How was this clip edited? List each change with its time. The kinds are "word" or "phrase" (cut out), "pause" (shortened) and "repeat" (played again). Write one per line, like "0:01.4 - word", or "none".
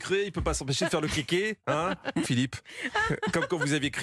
0:02.2 - phrase